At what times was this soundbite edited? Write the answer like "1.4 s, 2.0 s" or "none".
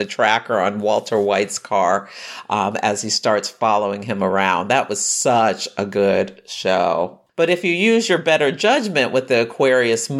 7.3 s